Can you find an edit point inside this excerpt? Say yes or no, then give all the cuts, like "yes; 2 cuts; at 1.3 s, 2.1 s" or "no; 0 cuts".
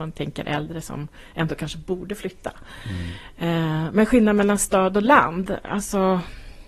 no; 0 cuts